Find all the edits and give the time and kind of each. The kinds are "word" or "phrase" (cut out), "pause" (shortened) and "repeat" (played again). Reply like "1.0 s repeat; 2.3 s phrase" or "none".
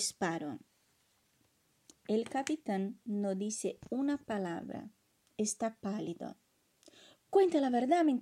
none